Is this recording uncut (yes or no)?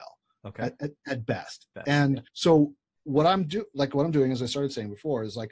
no